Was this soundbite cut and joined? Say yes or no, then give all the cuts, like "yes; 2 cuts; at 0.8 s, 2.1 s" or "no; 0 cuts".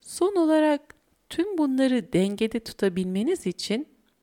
no; 0 cuts